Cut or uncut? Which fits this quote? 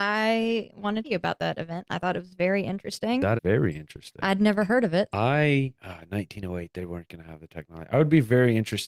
cut